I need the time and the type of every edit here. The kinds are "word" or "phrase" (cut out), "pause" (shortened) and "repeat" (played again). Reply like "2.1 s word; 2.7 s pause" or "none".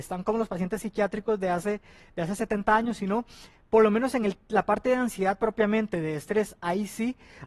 none